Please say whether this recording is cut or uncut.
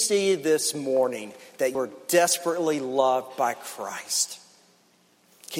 cut